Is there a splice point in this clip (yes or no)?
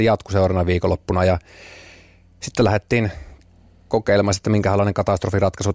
no